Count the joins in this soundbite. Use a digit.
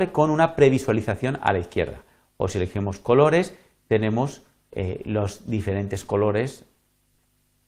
0